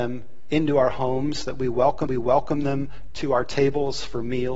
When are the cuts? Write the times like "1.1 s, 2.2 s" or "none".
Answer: 2.1 s